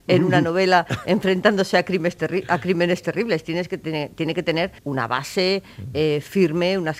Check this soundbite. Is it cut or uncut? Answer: cut